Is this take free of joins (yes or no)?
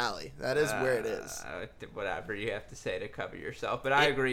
yes